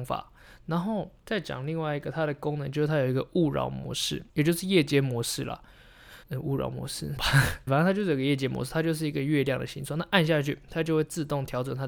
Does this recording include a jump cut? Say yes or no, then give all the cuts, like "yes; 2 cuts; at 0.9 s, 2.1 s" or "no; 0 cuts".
yes; 5 cuts; at 1.2 s, 4.3 s, 6.2 s, 7.2 s, 7.7 s